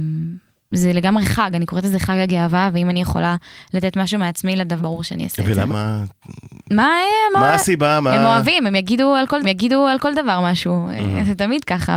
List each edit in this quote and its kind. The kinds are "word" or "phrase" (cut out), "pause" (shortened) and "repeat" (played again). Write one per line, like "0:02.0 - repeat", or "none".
0:04.8 - word
0:05.7 - phrase
0:09.4 - repeat